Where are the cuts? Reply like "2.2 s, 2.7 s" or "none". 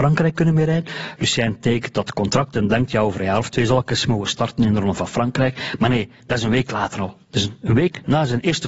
7.2 s